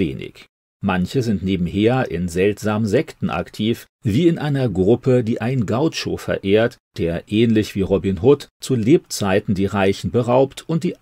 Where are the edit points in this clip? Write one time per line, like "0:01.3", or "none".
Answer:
none